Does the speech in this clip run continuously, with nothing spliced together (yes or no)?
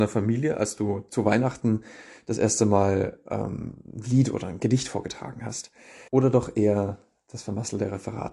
no